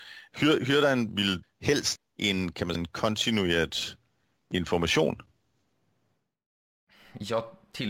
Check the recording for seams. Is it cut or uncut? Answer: cut